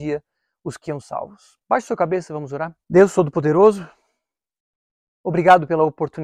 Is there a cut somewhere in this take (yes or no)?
yes